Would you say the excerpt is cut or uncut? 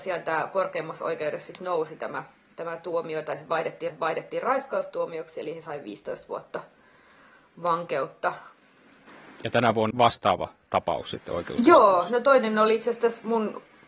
cut